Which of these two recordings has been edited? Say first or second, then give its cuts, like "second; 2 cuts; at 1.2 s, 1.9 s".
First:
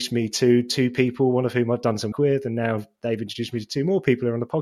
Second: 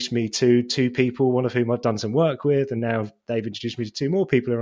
first; 1 cut; at 2.1 s